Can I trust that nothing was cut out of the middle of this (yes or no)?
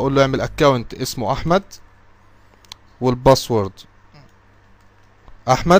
yes